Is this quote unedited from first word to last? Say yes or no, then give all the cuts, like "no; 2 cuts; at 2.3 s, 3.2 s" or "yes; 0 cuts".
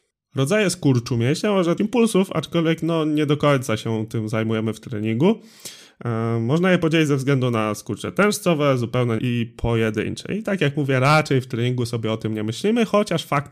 no; 2 cuts; at 1.8 s, 9.2 s